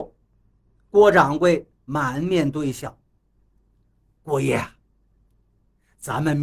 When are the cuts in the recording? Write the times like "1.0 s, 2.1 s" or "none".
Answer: none